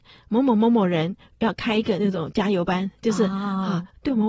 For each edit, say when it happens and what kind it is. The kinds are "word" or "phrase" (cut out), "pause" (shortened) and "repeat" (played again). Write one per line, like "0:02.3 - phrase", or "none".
none